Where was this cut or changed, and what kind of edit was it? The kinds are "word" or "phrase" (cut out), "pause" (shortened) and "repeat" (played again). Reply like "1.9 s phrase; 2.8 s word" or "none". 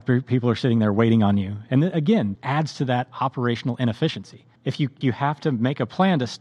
2.3 s word; 4.6 s pause; 5.0 s word